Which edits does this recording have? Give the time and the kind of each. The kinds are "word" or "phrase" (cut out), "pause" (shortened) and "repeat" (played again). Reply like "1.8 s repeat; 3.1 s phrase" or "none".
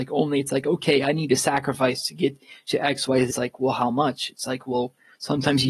3.3 s word